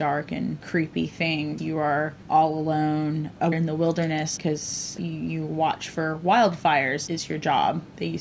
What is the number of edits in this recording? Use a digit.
4